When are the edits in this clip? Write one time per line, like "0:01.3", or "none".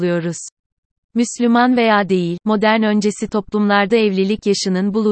none